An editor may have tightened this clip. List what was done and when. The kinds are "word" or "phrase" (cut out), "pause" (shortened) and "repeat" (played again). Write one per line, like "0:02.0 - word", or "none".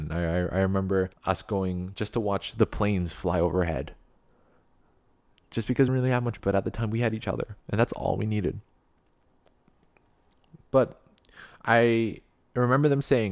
0:01.1 - pause
0:05.9 - word
0:06.4 - word
0:07.6 - pause